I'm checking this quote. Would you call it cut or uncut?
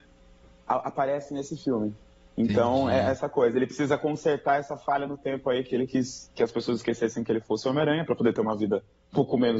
uncut